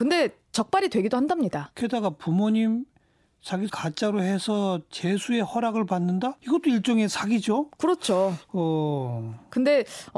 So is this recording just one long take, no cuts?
no; 2 cuts; at 3.7 s, 6.4 s

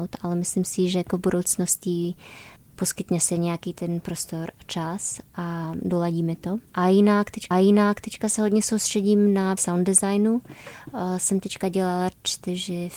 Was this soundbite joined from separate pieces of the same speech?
yes; 4 cuts; at 2.6 s, 6.7 s, 7.5 s, 9.6 s

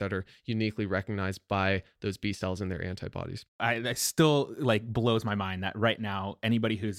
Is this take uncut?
yes; 0 cuts

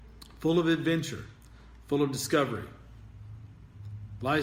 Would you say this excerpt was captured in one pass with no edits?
yes; 0 cuts

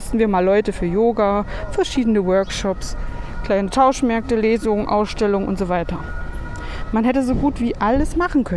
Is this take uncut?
yes; 0 cuts

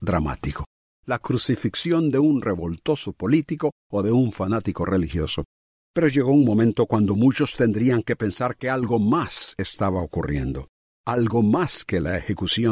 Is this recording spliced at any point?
no; 0 cuts

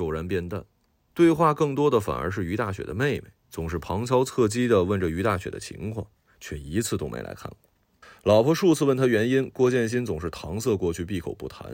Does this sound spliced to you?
yes; 1 cut; at 8.0 s

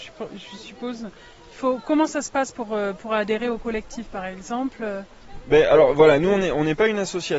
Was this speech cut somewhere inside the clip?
no; 0 cuts

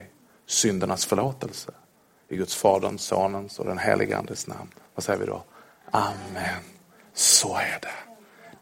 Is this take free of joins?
yes; 0 cuts

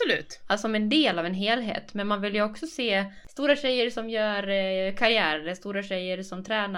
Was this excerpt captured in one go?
yes; 0 cuts

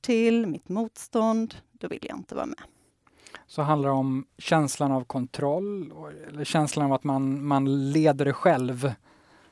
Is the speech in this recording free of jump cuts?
no; 1 cut; at 4.3 s

